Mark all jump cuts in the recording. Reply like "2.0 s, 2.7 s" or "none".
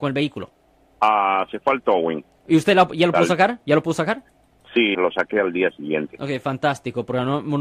4.9 s